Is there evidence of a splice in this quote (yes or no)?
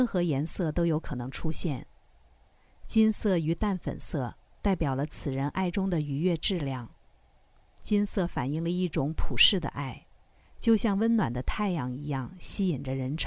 no